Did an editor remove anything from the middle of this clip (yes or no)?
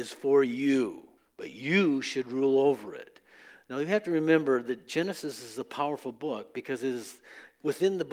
yes